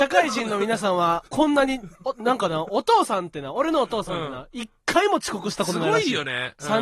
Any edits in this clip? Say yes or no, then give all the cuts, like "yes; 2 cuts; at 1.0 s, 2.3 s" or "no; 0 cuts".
yes; 2 cuts; at 1.3 s, 1.9 s